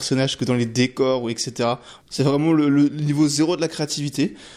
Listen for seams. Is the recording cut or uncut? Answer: uncut